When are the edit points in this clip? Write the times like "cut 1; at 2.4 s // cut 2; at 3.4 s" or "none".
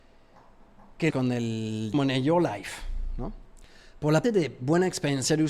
cut 1; at 1.1 s // cut 2; at 1.9 s // cut 3; at 4.2 s

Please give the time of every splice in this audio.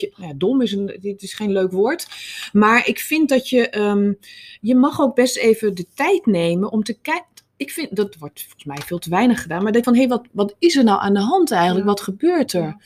cut 1; at 9.8 s

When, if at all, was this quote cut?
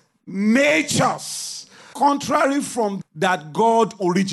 cut 1; at 1.9 s // cut 2; at 3.0 s

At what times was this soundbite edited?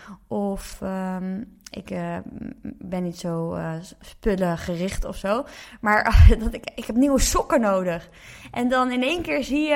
none

